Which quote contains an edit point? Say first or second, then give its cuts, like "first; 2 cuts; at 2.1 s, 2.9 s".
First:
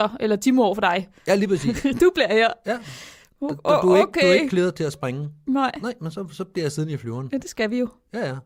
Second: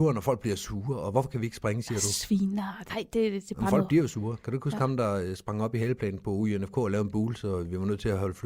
second; 1 cut; at 2.9 s